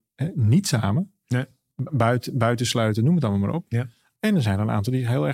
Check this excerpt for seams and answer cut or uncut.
uncut